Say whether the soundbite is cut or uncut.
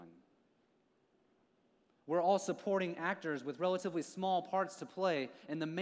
uncut